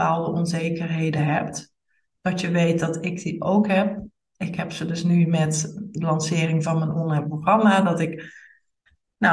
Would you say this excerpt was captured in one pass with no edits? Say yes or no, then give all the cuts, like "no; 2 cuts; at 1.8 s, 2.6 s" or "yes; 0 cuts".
yes; 0 cuts